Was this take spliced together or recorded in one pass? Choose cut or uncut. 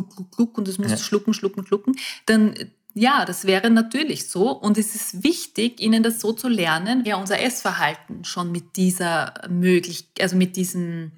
cut